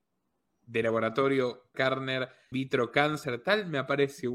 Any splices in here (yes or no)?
yes